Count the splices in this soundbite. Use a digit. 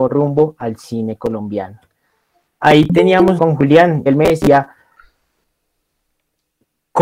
2